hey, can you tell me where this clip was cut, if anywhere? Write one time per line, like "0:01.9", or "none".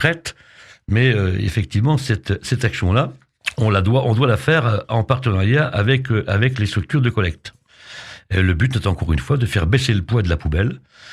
none

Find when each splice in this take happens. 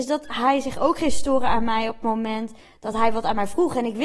none

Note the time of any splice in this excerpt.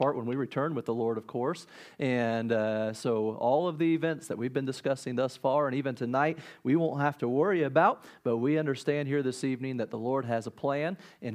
none

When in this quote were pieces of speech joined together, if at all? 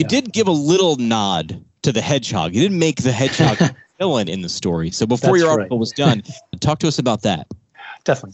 none

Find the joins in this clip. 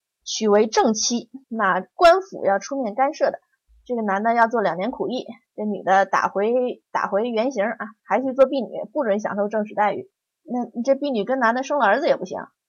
0:01.4

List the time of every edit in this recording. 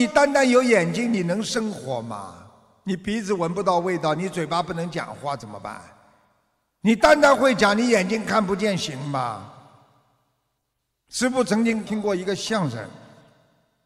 none

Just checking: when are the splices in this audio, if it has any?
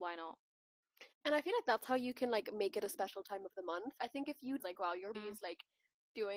0:01.1
0:04.0
0:04.6
0:05.1

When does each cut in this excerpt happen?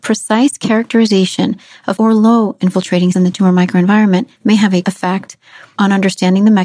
0:02.0
0:02.6
0:03.1
0:04.3
0:04.8

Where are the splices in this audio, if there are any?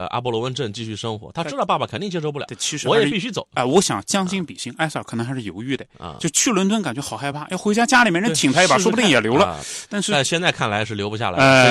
none

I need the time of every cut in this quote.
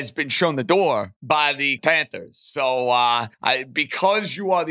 0:01.2
0:01.8
0:03.3

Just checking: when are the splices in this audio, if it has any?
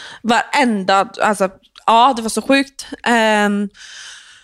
none

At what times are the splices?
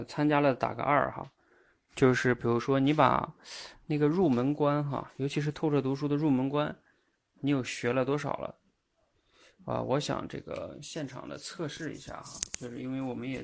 none

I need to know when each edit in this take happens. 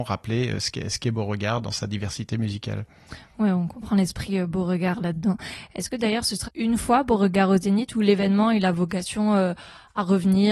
0:06.5

